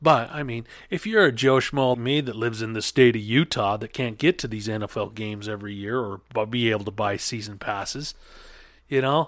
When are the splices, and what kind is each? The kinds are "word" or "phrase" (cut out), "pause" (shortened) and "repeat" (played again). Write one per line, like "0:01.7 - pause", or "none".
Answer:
0:01.9 - word